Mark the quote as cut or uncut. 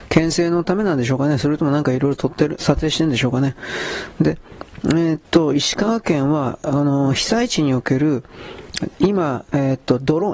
cut